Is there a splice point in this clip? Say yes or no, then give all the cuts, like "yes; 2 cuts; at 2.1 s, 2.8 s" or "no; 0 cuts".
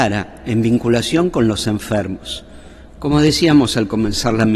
no; 0 cuts